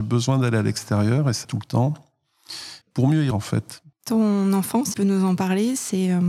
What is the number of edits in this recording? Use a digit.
5